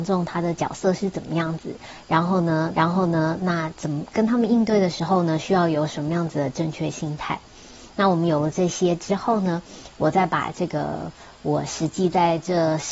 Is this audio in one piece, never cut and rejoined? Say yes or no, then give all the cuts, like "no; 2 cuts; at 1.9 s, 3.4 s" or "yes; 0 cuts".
no; 1 cut; at 2.7 s